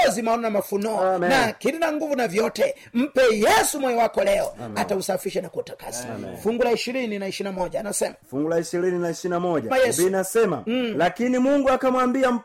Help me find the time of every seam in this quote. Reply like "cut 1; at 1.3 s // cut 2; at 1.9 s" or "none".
cut 1; at 8.2 s // cut 2; at 9.7 s